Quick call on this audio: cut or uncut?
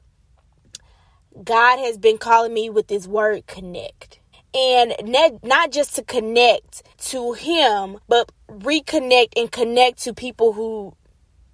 cut